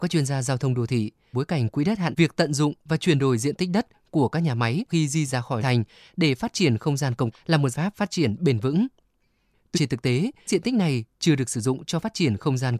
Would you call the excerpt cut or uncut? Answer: cut